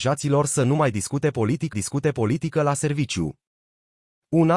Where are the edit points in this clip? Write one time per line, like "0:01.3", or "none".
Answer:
0:01.7